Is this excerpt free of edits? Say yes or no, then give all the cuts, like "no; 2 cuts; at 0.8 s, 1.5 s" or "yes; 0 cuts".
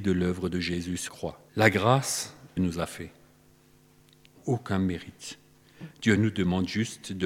no; 4 cuts; at 1.1 s, 1.5 s, 2.6 s, 4.4 s